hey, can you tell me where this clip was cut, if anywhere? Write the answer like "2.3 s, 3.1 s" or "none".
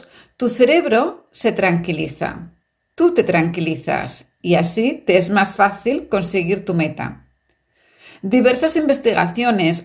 none